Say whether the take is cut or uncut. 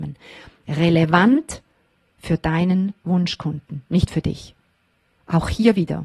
uncut